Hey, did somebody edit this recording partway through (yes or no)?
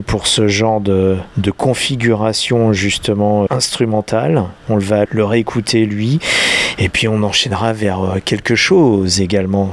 yes